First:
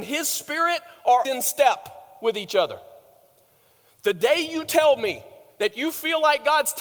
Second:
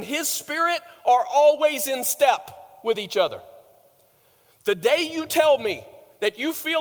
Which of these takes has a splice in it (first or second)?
first